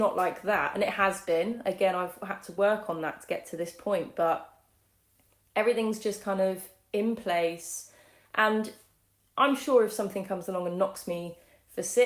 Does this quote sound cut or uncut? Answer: uncut